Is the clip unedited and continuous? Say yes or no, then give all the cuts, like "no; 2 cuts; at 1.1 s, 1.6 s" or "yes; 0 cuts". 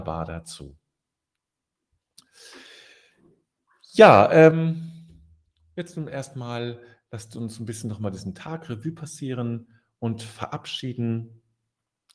yes; 0 cuts